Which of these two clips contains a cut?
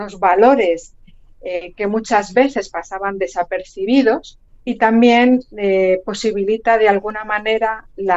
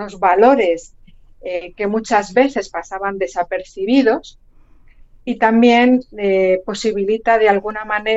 first; 1 cut; at 4.5 s

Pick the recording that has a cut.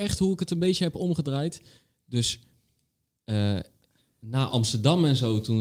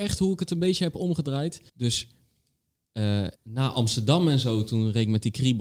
second; 2 cuts; at 1.7 s, 3.3 s

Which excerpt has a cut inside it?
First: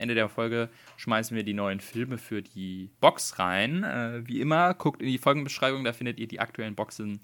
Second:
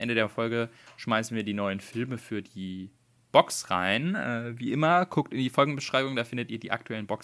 first; 1 cut; at 2.9 s

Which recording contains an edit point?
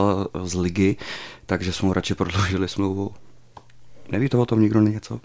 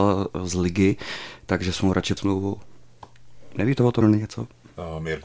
second; 2 cuts; at 2.2 s, 4.0 s

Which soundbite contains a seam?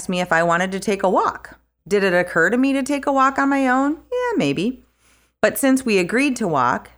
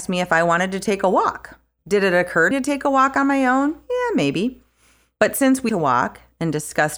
second; 2 cuts; at 2.5 s, 5.7 s

